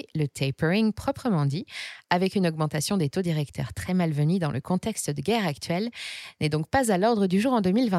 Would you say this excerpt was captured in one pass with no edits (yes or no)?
yes